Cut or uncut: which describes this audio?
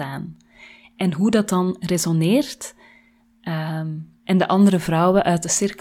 uncut